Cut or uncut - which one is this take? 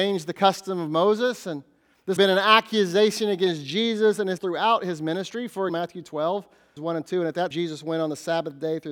cut